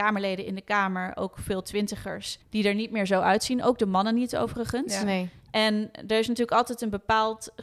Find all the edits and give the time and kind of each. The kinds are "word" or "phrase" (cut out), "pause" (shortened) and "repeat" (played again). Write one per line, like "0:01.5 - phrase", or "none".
0:02.4 - pause